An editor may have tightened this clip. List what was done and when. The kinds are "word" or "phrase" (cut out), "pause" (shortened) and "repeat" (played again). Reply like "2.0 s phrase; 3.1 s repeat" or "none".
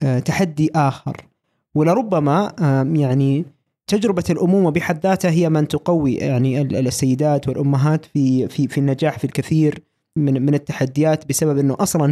10.2 s word